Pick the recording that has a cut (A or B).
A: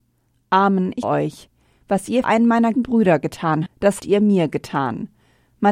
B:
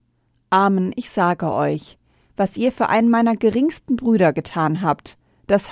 A